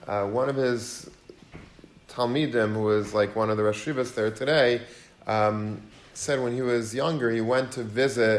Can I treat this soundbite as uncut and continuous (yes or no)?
yes